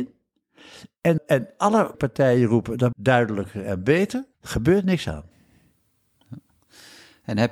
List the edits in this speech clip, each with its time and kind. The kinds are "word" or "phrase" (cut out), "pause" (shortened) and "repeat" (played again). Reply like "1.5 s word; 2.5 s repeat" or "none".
1.2 s word; 1.9 s word; 2.9 s word; 4.3 s pause